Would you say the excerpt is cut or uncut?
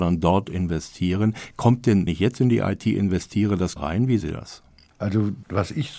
cut